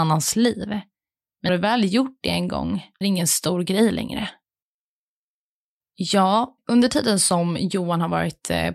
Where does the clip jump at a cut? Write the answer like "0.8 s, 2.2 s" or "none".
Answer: 1.5 s, 3.0 s, 6.6 s